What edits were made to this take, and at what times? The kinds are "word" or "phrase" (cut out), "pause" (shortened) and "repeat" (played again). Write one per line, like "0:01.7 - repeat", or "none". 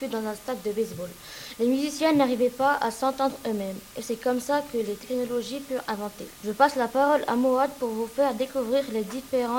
0:06.3 - pause